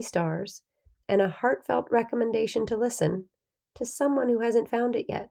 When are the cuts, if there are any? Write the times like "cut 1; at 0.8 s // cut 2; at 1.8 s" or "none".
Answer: none

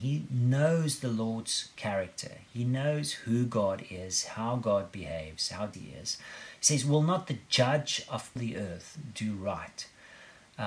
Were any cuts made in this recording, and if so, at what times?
cut 1; at 5.7 s // cut 2; at 8.4 s

